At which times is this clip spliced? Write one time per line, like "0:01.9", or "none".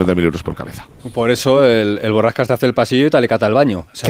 none